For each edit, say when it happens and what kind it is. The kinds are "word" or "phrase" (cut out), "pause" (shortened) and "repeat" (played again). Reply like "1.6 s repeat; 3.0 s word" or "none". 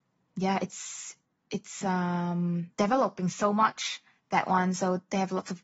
none